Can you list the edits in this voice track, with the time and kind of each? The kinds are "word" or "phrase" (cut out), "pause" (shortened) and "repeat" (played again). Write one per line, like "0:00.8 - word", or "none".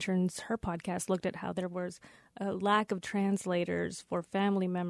none